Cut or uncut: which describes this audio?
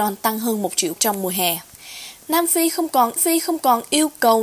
cut